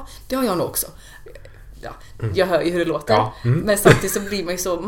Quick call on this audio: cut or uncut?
uncut